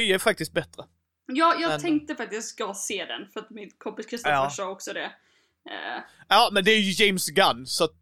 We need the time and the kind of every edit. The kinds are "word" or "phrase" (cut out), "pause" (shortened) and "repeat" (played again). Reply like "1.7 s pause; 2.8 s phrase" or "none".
none